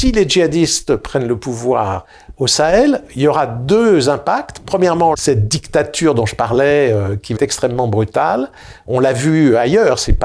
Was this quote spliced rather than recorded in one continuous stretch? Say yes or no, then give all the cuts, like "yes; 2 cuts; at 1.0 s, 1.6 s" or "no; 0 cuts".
yes; 2 cuts; at 5.1 s, 7.4 s